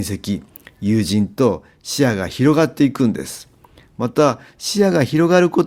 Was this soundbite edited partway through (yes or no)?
no